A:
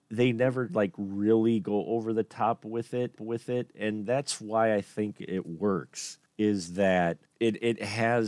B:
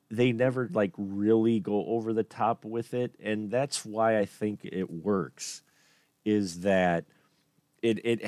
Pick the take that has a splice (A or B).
A